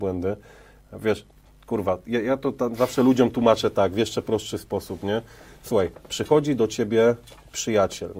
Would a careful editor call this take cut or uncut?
uncut